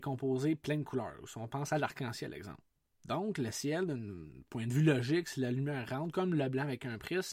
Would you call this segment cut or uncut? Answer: cut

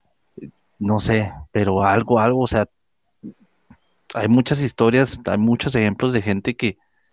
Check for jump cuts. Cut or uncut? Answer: uncut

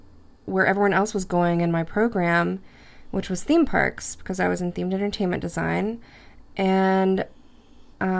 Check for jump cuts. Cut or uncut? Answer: uncut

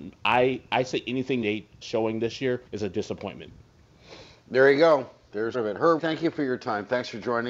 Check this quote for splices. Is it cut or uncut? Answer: cut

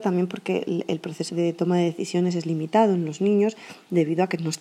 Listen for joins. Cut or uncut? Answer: cut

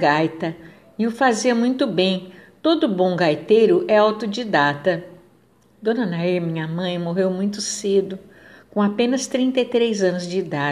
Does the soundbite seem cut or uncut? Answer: uncut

